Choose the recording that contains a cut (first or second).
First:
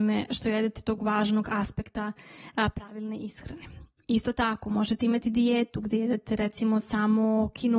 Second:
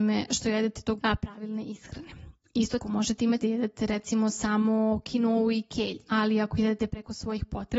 second